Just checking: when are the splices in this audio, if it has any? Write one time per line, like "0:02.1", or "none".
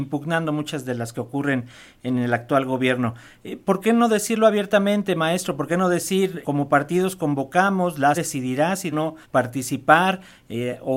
0:01.1
0:06.4
0:08.1
0:08.9
0:09.2